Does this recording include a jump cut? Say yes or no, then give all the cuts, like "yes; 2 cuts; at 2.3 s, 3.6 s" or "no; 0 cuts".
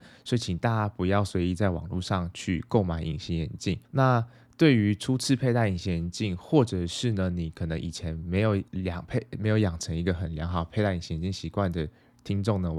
yes; 2 cuts; at 3.8 s, 8.7 s